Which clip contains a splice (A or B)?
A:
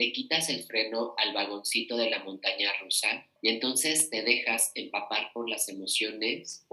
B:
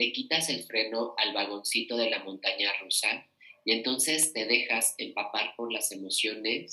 A